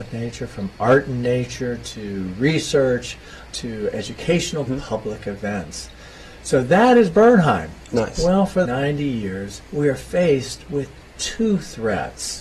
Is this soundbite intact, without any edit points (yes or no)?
no